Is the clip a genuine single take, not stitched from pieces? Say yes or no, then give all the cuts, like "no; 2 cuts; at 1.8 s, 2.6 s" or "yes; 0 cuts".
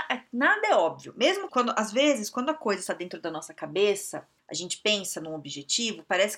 no; 2 cuts; at 1.5 s, 4.4 s